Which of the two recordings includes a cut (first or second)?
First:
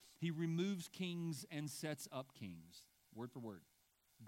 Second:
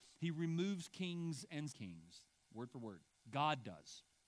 second